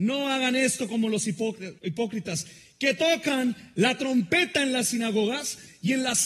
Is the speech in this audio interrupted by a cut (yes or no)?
yes